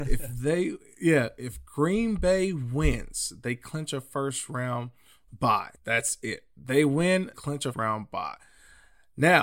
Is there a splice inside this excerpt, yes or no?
yes